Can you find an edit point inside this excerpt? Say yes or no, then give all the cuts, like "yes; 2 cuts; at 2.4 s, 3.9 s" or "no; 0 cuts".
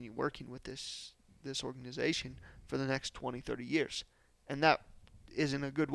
no; 0 cuts